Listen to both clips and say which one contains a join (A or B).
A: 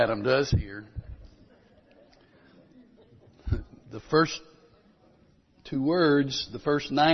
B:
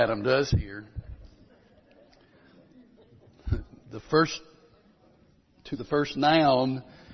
B